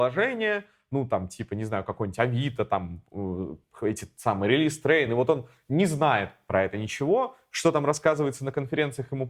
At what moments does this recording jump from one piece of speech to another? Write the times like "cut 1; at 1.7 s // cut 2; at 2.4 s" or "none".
none